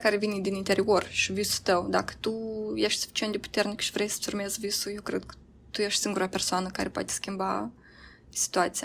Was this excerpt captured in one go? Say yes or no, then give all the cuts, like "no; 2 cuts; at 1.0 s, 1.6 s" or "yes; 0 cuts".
yes; 0 cuts